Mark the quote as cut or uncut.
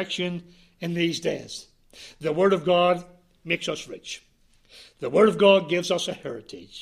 uncut